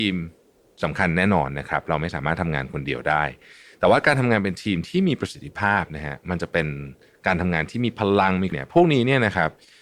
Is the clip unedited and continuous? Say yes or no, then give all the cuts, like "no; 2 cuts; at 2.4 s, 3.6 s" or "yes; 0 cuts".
no; 1 cut; at 8.5 s